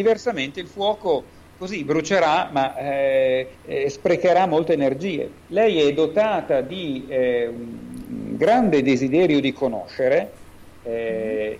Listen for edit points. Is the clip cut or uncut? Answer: cut